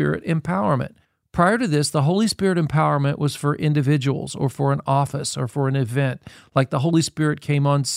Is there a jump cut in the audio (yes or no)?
yes